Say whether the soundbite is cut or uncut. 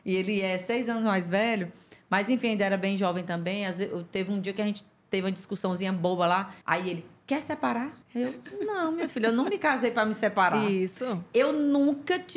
cut